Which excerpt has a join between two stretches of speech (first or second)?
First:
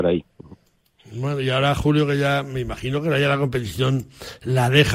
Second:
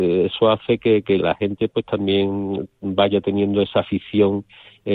second